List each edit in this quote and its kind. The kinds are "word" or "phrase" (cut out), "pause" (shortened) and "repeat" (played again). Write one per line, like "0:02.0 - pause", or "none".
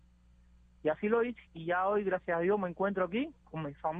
0:01.5 - pause